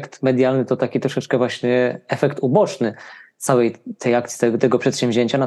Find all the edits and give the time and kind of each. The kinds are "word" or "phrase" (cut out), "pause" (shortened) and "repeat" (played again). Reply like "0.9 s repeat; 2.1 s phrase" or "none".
none